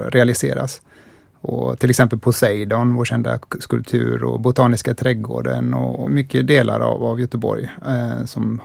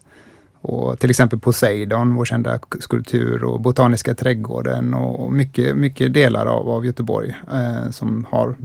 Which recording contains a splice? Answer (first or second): first